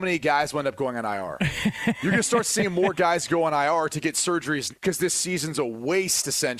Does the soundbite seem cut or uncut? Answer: cut